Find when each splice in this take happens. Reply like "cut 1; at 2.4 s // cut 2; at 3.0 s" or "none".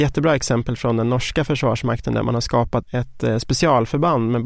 cut 1; at 2.8 s